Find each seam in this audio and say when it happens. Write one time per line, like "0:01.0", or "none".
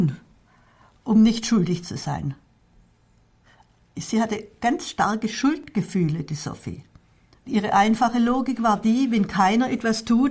none